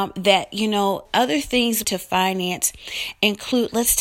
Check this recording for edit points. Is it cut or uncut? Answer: cut